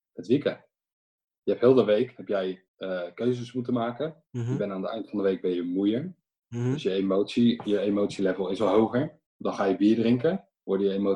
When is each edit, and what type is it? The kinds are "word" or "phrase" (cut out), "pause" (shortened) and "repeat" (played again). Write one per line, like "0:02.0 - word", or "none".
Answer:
0:02.7 - pause
0:04.3 - pause
0:09.3 - pause